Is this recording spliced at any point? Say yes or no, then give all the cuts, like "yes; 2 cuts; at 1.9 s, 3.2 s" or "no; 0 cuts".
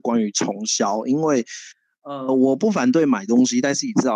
no; 0 cuts